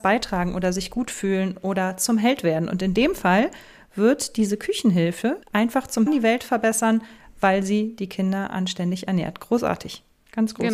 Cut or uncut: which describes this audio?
cut